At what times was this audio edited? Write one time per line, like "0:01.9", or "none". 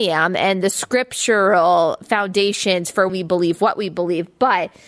0:03.1